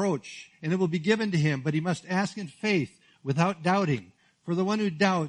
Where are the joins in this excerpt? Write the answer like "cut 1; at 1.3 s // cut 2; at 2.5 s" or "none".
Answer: none